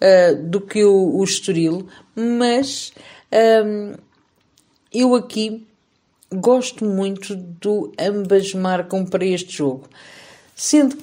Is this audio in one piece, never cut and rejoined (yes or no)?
yes